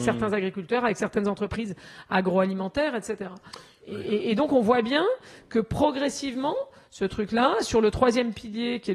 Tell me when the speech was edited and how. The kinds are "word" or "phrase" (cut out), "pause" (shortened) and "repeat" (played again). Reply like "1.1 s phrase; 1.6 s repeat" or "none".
none